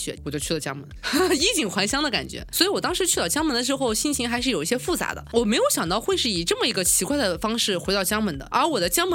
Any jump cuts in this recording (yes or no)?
no